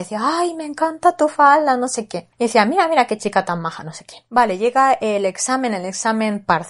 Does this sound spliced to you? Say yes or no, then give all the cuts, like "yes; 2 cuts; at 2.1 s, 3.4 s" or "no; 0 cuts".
no; 0 cuts